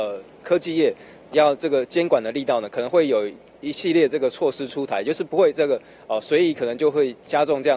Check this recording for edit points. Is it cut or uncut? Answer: cut